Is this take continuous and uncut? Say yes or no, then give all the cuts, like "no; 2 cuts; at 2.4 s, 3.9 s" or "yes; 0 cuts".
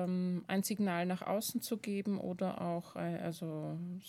yes; 0 cuts